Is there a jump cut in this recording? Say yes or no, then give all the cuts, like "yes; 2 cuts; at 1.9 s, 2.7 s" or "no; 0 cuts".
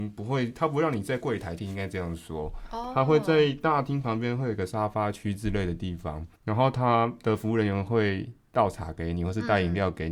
yes; 2 cuts; at 1.6 s, 6.3 s